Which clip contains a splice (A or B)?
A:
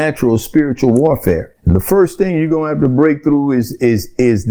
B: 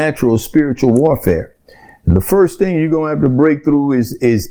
A